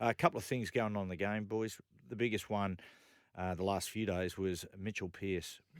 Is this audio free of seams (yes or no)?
yes